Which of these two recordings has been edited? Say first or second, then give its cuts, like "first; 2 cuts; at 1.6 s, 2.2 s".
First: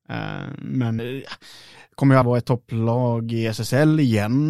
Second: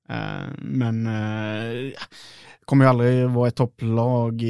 first; 2 cuts; at 1.0 s, 2.2 s